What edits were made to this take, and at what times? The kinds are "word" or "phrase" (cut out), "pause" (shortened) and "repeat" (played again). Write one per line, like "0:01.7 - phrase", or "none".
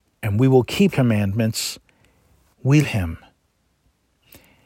0:00.9 - word
0:02.5 - word
0:02.8 - word